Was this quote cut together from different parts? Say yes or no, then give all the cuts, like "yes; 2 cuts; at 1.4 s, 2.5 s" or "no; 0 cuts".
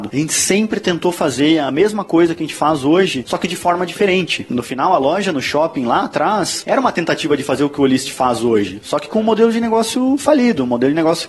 no; 0 cuts